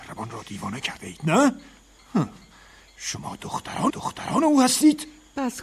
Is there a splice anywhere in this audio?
yes; 1 cut; at 3.9 s

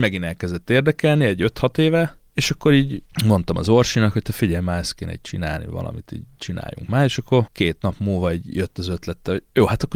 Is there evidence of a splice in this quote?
no; 0 cuts

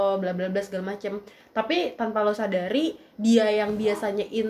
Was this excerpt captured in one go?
yes; 0 cuts

